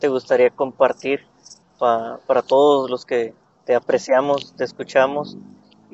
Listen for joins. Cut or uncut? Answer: uncut